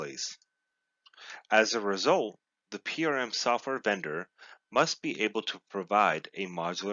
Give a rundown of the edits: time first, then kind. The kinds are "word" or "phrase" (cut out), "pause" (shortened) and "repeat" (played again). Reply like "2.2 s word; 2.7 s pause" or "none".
none